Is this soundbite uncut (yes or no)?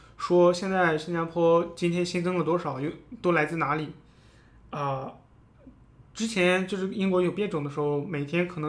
yes